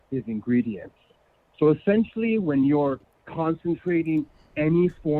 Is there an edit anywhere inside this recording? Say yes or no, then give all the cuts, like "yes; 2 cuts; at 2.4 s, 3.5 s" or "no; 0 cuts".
no; 0 cuts